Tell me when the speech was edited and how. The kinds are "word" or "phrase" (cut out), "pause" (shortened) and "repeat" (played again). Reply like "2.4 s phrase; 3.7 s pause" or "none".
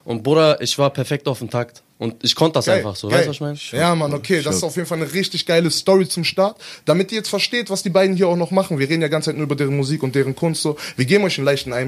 1.9 s pause